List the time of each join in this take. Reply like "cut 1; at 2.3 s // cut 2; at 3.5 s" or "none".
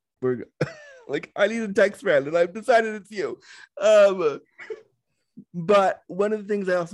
cut 1; at 5.5 s